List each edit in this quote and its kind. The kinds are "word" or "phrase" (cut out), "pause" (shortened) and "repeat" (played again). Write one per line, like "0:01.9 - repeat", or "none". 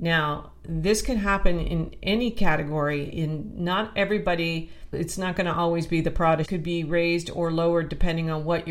0:06.4 - phrase